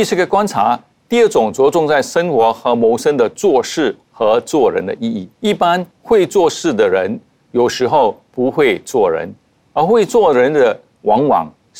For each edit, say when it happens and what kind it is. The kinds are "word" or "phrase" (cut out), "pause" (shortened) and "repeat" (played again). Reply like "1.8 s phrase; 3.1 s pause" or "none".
4.0 s pause; 5.3 s pause; 5.9 s pause

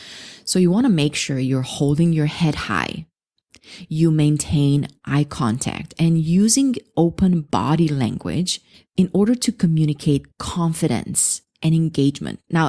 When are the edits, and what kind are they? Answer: 8.7 s pause; 10.3 s pause

